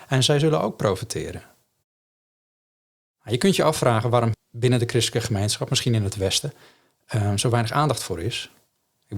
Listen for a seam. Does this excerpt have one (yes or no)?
yes